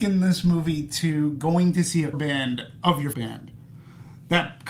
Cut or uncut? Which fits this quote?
cut